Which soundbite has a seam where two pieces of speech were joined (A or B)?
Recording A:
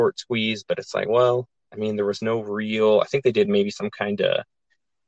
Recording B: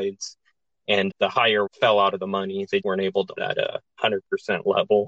B